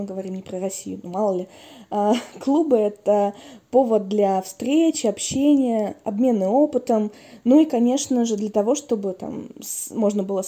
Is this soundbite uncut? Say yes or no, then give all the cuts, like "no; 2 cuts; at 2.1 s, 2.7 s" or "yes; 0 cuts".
yes; 0 cuts